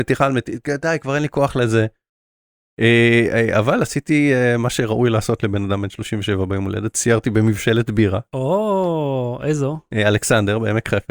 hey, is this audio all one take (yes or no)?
yes